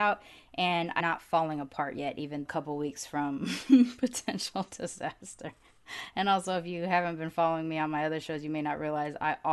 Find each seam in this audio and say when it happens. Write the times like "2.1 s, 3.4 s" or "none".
1.0 s, 2.4 s

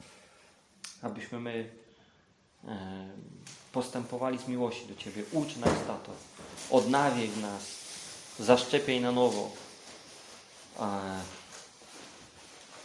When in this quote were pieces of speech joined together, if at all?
none

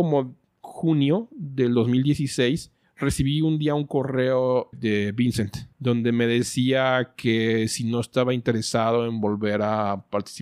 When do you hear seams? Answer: 2.8 s, 4.7 s, 5.7 s

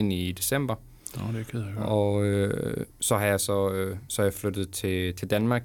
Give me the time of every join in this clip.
2.9 s

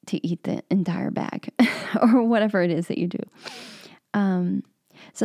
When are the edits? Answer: none

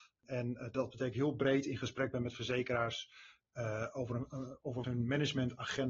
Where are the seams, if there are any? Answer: 1.1 s, 4.8 s

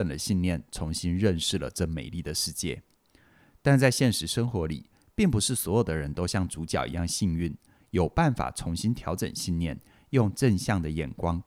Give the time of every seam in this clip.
none

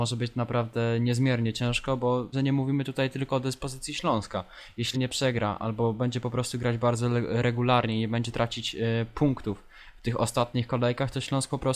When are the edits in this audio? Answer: 2.3 s, 4.9 s

